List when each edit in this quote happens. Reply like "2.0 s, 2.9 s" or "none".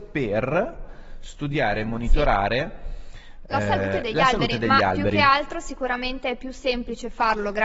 none